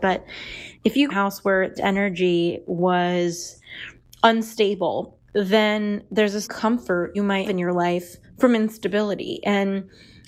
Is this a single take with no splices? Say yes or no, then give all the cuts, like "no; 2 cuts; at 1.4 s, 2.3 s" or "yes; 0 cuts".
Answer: no; 7 cuts; at 1.1 s, 1.7 s, 5.3 s, 6.4 s, 7.1 s, 7.4 s, 8.2 s